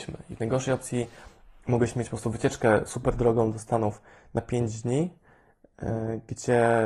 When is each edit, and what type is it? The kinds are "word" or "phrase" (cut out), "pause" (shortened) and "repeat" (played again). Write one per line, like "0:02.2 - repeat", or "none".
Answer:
none

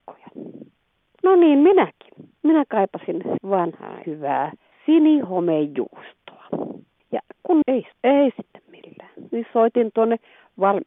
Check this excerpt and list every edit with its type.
0:03.4 - word
0:04.0 - word
0:07.6 - word
0:07.9 - word

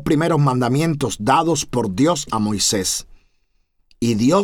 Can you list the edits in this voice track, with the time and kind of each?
none

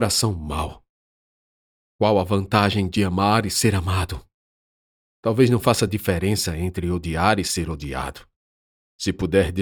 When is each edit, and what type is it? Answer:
none

